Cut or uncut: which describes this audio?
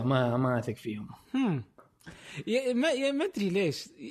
cut